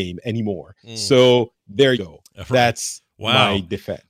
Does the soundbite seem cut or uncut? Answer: cut